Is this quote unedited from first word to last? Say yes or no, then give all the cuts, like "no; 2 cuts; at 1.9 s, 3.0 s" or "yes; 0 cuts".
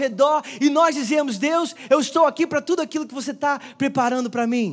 yes; 0 cuts